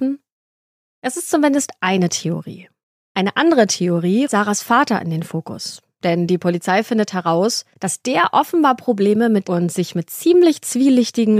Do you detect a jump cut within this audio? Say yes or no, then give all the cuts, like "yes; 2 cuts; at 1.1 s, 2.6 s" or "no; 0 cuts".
yes; 4 cuts; at 2.8 s, 4.2 s, 7.7 s, 9.4 s